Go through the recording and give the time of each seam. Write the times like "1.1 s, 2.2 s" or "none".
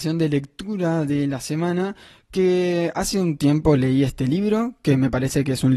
none